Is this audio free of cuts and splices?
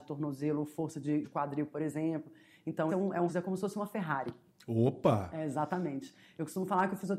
no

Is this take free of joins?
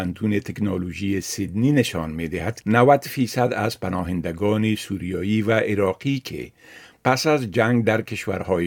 no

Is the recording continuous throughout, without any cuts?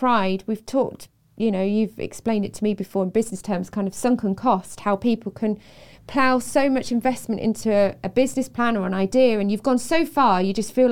yes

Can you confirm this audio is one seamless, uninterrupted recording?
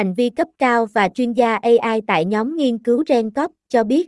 yes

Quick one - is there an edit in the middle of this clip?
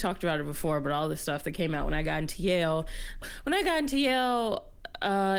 no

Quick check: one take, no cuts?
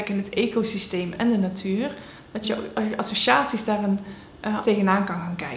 no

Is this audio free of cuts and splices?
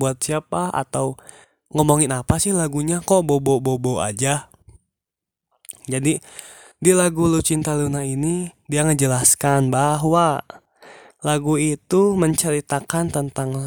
yes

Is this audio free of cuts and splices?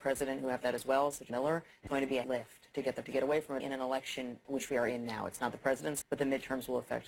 no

